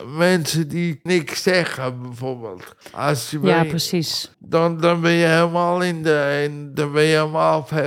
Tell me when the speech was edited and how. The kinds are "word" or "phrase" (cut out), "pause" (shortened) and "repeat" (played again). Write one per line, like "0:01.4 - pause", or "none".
0:01.1 - word
0:02.8 - pause
0:04.3 - pause